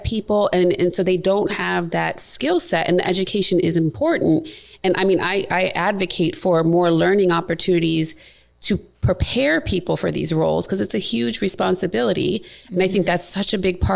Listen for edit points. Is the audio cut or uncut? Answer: uncut